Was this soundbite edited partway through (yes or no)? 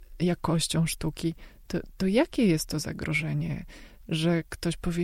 no